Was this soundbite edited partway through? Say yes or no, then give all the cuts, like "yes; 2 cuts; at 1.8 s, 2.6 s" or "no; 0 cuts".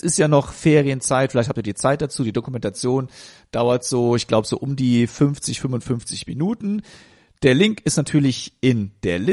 no; 0 cuts